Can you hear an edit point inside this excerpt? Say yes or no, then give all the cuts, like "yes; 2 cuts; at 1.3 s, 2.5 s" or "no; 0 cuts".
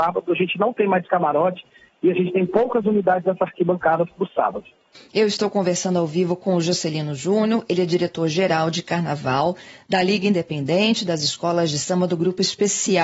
no; 0 cuts